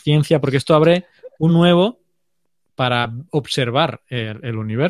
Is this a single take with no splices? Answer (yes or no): no